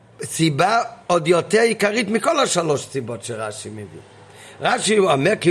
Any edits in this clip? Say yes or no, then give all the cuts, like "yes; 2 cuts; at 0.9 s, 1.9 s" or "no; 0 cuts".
no; 0 cuts